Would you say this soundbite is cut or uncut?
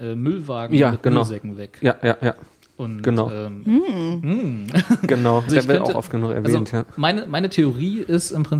cut